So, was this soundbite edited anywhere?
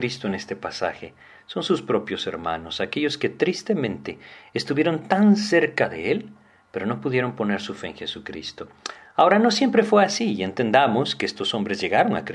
no; 0 cuts

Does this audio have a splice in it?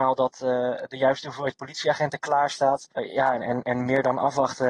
yes; 1 cut; at 2.9 s

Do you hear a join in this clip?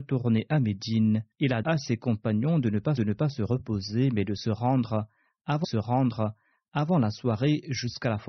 yes; 4 cuts; at 1.3 s, 1.6 s, 3.0 s, 5.6 s

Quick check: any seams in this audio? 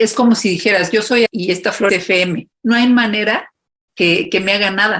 yes; 4 cuts; at 1.3 s, 1.9 s, 2.5 s, 3.9 s

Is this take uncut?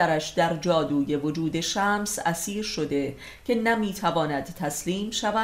yes; 0 cuts

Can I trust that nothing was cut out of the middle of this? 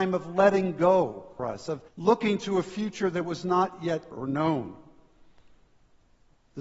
no; 3 cuts; at 1.4 s, 1.9 s, 4.1 s

